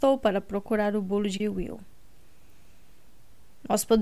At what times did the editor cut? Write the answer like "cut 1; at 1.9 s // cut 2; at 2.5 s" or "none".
cut 1; at 1.4 s